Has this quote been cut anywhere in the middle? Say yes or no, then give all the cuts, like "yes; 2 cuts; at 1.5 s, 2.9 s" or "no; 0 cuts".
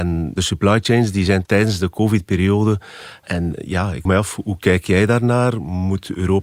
yes; 2 cuts; at 1.4 s, 4.0 s